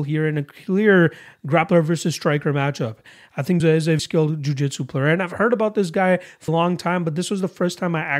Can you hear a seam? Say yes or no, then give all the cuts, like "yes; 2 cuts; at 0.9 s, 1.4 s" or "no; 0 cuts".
yes; 3 cuts; at 3.6 s, 4.0 s, 6.5 s